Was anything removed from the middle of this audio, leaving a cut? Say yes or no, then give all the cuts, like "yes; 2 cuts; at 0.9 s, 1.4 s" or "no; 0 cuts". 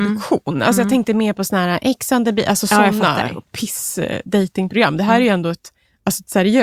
no; 0 cuts